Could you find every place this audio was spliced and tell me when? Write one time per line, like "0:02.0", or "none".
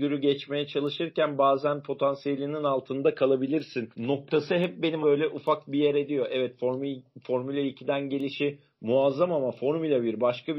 0:03.9
0:05.0